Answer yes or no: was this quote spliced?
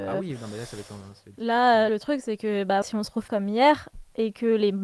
yes